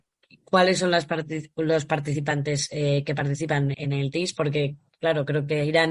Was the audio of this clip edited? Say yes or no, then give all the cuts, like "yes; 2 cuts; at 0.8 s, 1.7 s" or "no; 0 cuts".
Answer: yes; 1 cut; at 3.7 s